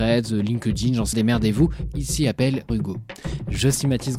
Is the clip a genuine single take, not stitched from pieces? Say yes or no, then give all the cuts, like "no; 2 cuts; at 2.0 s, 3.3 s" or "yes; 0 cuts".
no; 2 cuts; at 1.1 s, 2.7 s